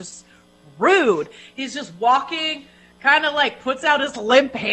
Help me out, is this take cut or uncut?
uncut